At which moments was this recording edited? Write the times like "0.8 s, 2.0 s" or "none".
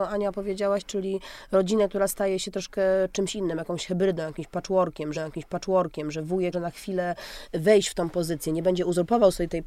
5.1 s, 6.5 s